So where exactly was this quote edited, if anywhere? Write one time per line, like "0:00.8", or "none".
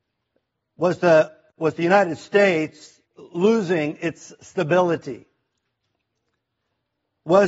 0:03.1